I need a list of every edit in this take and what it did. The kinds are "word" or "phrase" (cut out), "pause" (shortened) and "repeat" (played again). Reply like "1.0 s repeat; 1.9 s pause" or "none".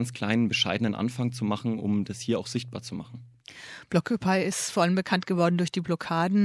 none